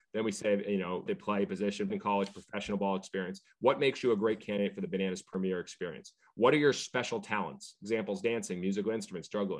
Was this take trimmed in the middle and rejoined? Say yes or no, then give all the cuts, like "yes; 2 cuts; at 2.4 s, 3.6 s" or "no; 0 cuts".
yes; 2 cuts; at 1.1 s, 1.9 s